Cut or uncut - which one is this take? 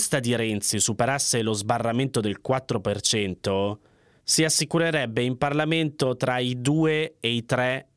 uncut